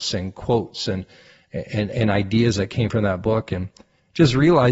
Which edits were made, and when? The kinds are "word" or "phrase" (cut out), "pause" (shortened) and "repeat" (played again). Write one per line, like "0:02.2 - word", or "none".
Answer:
none